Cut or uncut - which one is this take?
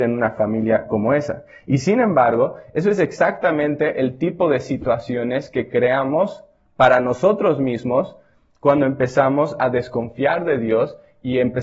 uncut